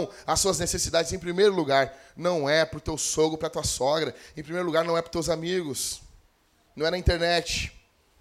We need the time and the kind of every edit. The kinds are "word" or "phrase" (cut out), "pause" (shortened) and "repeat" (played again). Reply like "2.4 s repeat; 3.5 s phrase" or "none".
none